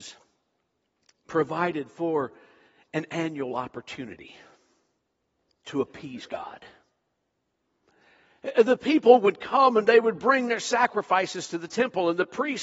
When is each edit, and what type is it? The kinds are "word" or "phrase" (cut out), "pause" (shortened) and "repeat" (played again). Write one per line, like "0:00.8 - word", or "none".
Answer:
none

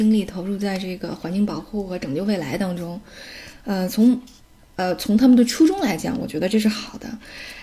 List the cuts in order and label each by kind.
none

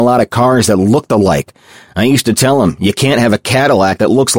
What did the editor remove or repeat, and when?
none

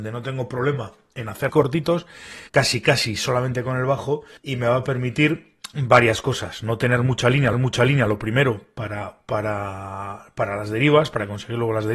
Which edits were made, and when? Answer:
0:01.5 - phrase
0:02.5 - pause
0:04.4 - pause
0:07.5 - repeat

